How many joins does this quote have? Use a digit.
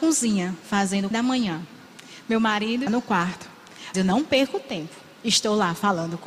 3